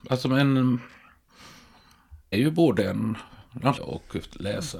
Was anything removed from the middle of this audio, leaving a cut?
yes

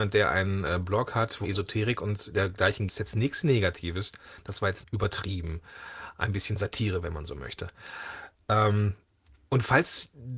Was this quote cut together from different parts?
yes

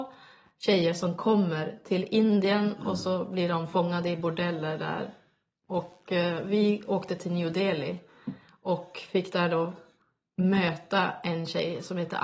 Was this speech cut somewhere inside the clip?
no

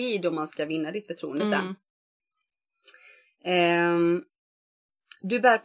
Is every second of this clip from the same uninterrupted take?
yes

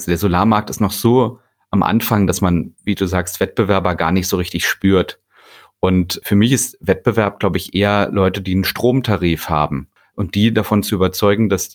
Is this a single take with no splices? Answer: yes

